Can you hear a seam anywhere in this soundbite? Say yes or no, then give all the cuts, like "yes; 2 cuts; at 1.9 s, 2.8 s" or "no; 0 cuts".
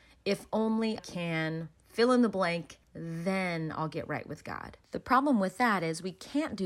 yes; 4 cuts; at 1.0 s, 1.8 s, 2.8 s, 4.8 s